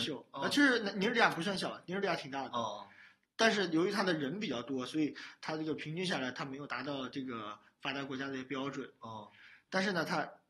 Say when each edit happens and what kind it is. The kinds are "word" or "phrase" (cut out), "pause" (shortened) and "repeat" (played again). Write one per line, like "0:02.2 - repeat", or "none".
none